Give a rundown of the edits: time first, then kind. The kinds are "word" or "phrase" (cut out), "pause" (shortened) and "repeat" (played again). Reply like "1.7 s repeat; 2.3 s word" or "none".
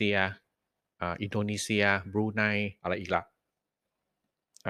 2.8 s pause

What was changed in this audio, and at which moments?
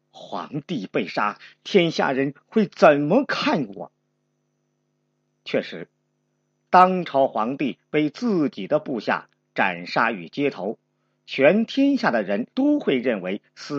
12.5 s pause

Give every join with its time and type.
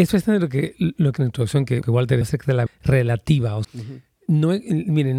1.2 s word; 1.8 s word; 2.2 s word; 2.7 s word; 3.6 s word

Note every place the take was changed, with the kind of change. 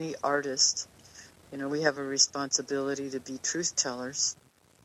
none

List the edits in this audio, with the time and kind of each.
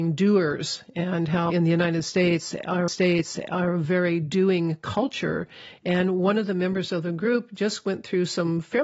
1.5 s phrase; 2.9 s repeat

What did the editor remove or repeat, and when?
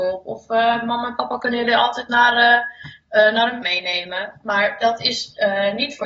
3.6 s word

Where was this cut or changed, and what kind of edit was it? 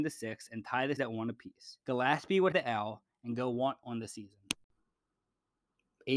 1.0 s word; 1.8 s pause; 2.5 s word; 3.8 s phrase

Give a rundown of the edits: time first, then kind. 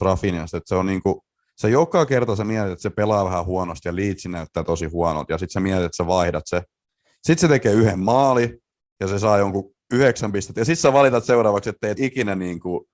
12.0 s word

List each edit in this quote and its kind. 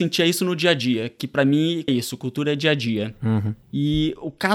1.9 s phrase; 3.6 s pause

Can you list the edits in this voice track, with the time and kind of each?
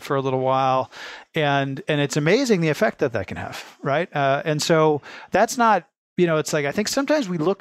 none

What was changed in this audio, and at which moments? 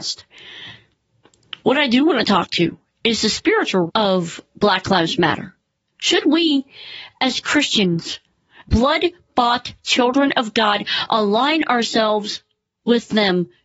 1.6 s pause; 3.9 s word; 8.6 s word

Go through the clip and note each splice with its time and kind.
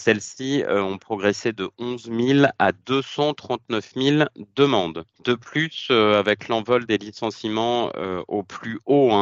5.1 s pause

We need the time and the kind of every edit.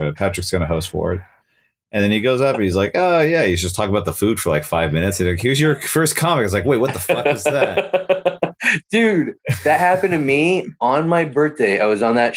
none

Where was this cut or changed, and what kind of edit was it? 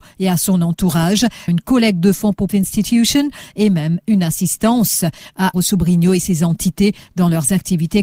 1.5 s phrase; 2.5 s phrase; 5.5 s word

